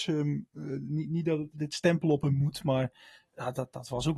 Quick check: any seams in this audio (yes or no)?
yes